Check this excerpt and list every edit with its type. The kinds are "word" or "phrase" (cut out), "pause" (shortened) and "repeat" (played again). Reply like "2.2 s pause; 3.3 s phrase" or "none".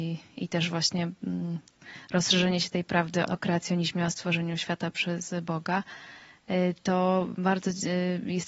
3.3 s word